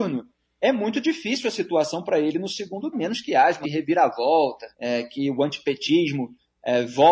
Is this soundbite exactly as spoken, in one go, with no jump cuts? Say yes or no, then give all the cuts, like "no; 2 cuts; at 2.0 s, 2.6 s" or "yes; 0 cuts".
no; 3 cuts; at 2.9 s, 3.6 s, 4.7 s